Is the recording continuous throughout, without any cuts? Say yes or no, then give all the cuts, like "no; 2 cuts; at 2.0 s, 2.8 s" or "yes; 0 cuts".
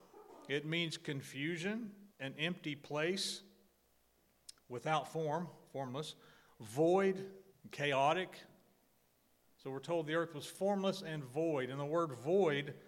no; 3 cuts; at 2.1 s, 4.6 s, 7.5 s